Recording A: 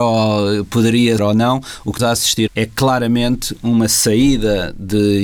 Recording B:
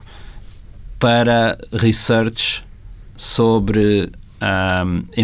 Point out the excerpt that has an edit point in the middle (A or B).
A